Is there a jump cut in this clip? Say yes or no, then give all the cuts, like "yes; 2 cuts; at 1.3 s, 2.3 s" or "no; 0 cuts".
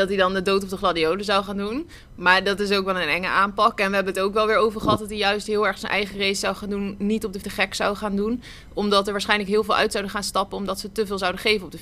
yes; 1 cut; at 7.4 s